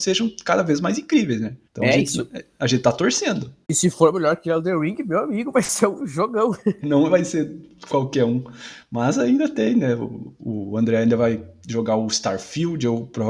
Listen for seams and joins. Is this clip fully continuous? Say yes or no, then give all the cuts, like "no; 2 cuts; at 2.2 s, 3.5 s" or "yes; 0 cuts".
no; 3 cuts; at 1.6 s, 3.6 s, 6.8 s